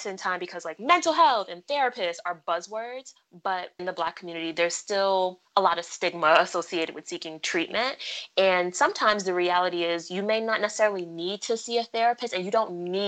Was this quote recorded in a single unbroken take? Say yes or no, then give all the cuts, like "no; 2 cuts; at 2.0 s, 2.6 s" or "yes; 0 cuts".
no; 2 cuts; at 3.8 s, 5.4 s